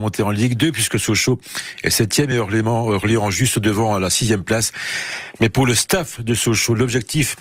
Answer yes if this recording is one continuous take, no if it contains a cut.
yes